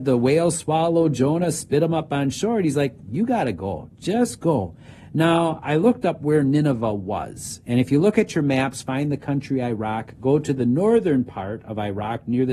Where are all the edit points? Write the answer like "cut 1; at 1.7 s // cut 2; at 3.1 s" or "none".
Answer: none